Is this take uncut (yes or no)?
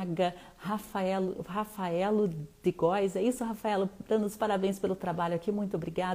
yes